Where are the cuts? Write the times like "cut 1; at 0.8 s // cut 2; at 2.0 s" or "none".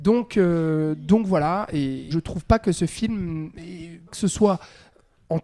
cut 1; at 2.1 s // cut 2; at 4.1 s